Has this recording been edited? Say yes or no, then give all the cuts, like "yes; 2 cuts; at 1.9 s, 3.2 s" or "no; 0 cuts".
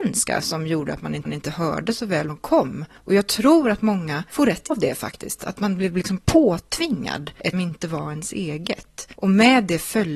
yes; 4 cuts; at 1.3 s, 2.3 s, 4.7 s, 7.5 s